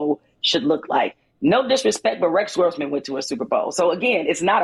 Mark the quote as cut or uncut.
uncut